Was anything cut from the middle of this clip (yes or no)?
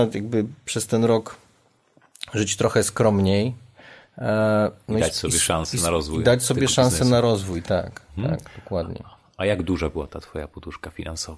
no